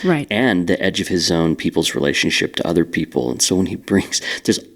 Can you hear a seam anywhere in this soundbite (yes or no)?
no